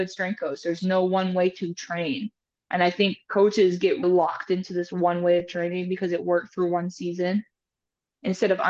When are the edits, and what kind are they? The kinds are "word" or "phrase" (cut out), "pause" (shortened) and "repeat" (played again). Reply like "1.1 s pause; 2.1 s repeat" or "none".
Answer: 4.0 s word